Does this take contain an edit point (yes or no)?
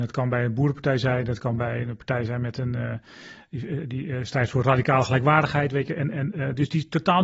no